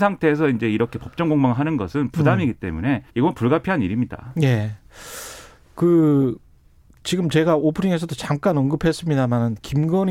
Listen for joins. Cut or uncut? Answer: cut